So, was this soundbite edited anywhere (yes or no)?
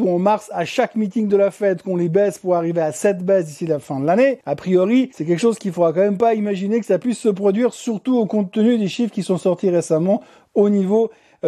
no